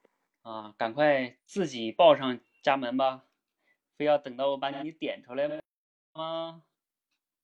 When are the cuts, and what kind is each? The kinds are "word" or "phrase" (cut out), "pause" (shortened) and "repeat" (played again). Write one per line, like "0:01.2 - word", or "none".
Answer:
none